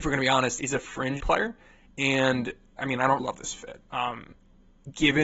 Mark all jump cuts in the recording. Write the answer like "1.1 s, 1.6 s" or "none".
1.2 s, 2.8 s, 3.2 s